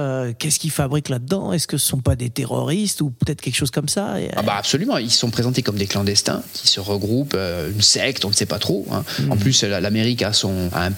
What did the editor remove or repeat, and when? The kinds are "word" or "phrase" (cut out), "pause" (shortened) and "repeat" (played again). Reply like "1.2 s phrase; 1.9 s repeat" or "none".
none